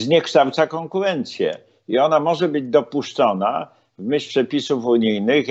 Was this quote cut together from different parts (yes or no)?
no